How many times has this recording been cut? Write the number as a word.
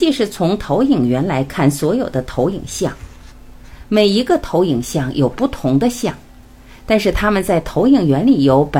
zero